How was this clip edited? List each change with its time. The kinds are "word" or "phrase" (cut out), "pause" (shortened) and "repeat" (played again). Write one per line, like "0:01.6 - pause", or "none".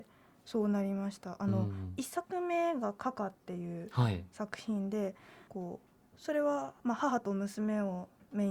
0:05.5 - pause
0:06.8 - pause